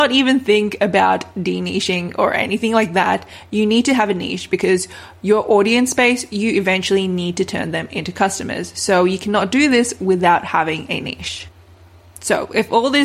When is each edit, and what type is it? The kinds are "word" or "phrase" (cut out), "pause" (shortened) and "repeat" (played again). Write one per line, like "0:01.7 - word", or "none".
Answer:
none